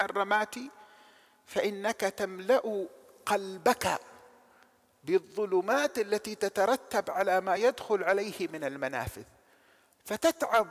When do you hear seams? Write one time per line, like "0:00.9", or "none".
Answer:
none